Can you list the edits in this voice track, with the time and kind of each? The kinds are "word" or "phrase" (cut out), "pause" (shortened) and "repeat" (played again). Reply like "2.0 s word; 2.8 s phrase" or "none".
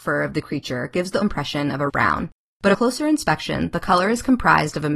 1.2 s word; 1.9 s word; 2.7 s word